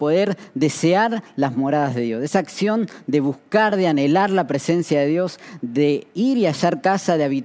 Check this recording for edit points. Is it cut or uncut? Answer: uncut